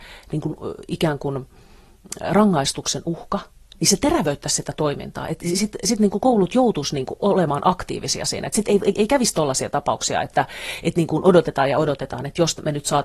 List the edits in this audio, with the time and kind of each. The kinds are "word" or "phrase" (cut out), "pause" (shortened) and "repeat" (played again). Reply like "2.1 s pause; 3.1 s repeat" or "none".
8.9 s word